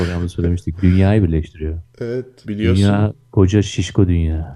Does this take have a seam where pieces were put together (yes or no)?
yes